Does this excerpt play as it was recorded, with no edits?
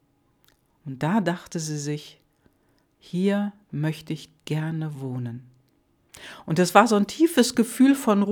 yes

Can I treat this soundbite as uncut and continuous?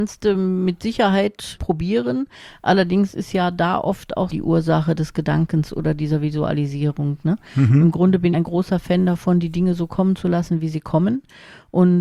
no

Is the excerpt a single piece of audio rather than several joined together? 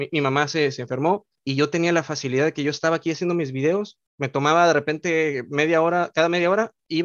no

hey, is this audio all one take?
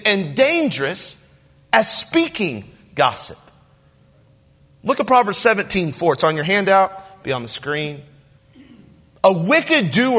yes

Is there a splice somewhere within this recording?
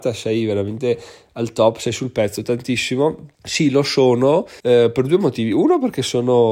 yes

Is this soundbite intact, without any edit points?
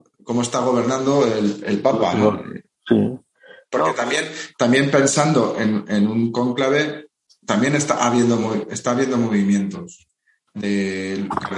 yes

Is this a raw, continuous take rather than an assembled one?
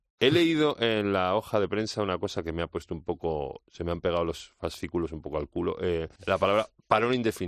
no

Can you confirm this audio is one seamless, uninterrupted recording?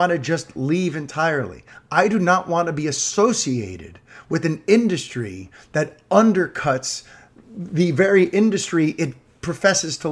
yes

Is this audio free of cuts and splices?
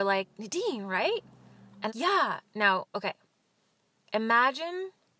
no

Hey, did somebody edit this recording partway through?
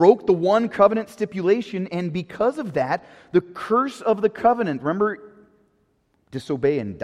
no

